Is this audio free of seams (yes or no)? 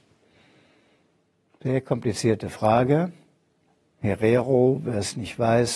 no